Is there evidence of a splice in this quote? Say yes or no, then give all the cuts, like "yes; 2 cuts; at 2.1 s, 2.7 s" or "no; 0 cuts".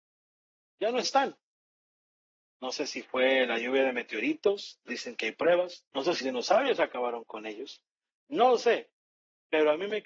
yes; 3 cuts; at 4.9 s, 5.9 s, 6.2 s